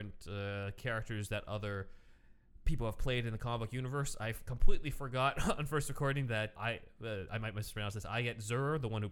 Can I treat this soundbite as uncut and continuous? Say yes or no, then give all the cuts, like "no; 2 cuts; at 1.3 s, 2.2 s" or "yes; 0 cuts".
no; 1 cut; at 6.6 s